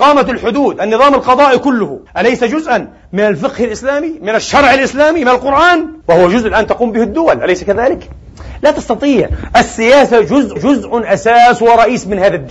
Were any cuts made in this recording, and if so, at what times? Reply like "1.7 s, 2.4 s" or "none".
2.1 s, 6.0 s, 10.6 s

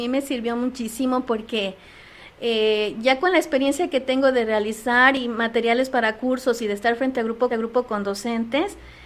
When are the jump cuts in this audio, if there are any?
7.5 s

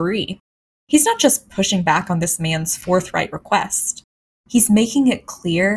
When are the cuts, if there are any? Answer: none

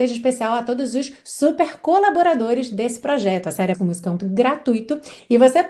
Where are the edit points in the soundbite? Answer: 3.7 s, 4.2 s

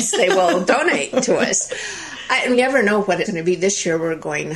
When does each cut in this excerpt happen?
2.5 s, 3.2 s

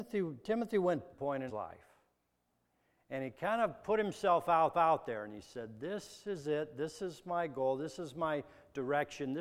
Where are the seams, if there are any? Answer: 1.1 s, 1.5 s, 4.7 s

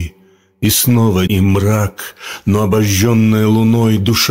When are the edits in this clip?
1.3 s

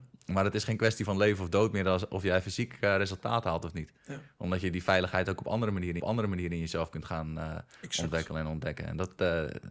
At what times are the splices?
6.0 s

